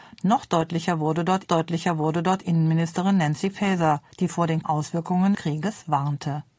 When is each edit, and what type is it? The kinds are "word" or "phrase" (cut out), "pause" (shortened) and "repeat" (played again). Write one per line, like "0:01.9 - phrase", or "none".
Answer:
0:01.5 - repeat
0:04.1 - pause
0:04.6 - word
0:05.3 - word